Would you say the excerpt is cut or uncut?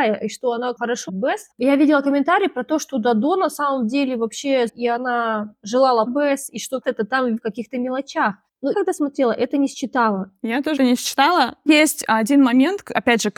cut